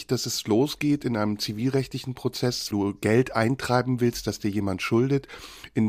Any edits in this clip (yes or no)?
yes